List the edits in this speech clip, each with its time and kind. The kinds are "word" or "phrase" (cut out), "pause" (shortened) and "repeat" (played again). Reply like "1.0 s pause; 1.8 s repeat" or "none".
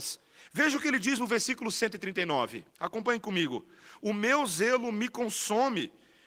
2.7 s pause